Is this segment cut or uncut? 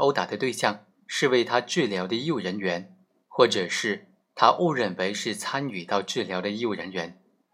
uncut